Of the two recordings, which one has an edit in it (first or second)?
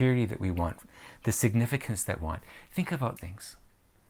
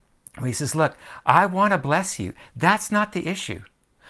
first